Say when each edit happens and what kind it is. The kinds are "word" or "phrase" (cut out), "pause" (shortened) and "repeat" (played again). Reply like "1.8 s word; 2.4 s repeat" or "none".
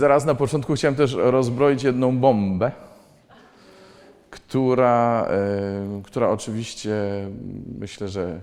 none